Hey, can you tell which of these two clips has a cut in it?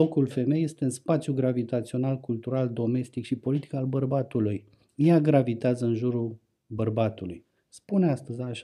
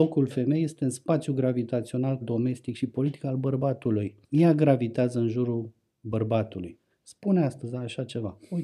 second; 2 cuts; at 2.2 s, 4.2 s

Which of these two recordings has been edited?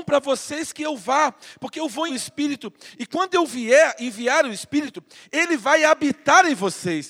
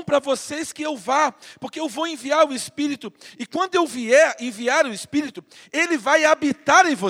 first; 1 cut; at 2.1 s

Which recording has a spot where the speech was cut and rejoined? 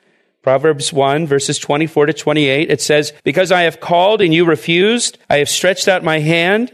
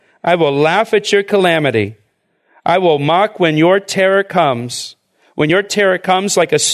first; 2 cuts; at 3.2 s, 5.2 s

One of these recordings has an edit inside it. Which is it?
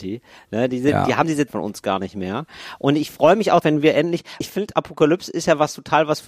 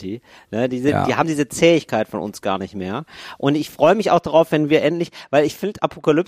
first; 3 cuts; at 1.5 s, 3.6 s, 4.4 s

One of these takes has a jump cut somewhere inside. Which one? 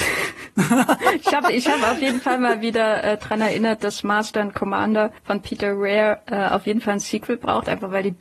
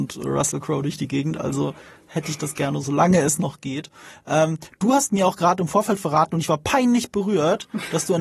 first; 1 cut; at 5.2 s

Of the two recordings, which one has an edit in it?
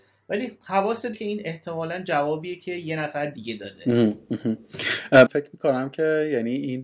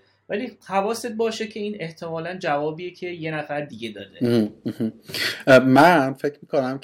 first; 2 cuts; at 1.1 s, 5.3 s

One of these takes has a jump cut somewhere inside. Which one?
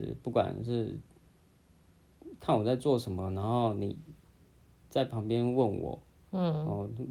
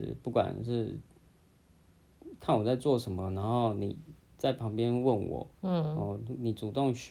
second; 2 cuts; at 4.2 s, 5.5 s

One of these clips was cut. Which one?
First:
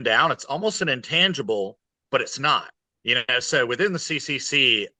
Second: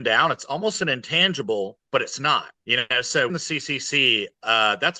second; 3 cuts; at 1.9 s, 2.6 s, 3.3 s

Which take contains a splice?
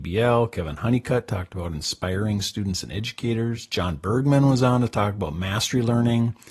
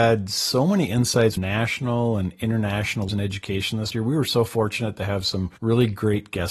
second; 4 cuts; at 1.4 s, 3.1 s, 3.9 s, 5.6 s

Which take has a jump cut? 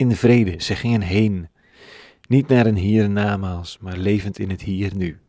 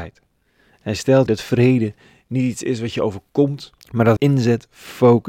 second; 3 cuts; at 1.3 s, 3.8 s, 4.2 s

